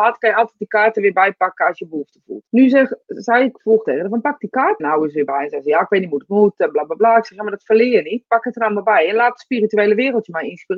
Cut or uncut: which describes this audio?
cut